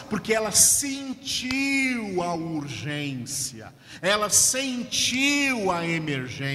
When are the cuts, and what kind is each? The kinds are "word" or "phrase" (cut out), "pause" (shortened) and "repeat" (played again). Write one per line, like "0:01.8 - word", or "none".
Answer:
none

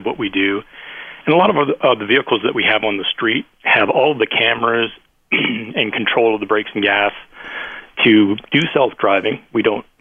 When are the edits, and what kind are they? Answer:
none

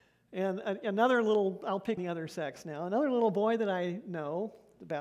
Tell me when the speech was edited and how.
0:02.0 - word

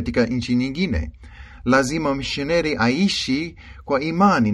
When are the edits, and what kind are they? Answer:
none

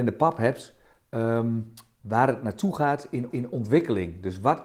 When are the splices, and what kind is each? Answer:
0:03.3 - repeat

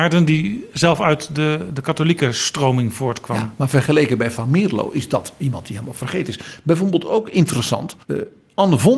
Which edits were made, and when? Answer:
0:08.0 - pause

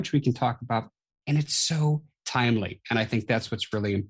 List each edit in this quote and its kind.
none

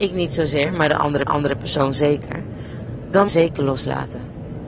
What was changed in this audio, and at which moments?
0:01.3 - repeat
0:03.3 - phrase

